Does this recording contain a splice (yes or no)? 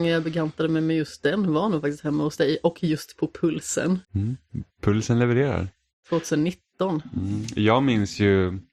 yes